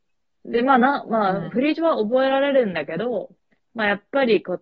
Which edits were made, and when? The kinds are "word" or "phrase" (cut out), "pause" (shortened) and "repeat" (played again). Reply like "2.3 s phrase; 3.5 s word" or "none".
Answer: 3.6 s pause